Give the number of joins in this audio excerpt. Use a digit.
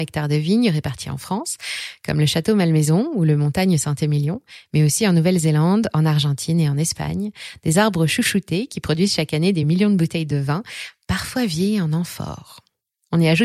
0